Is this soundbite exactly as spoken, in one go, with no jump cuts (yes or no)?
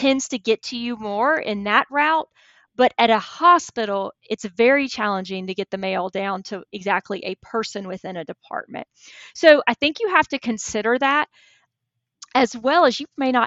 yes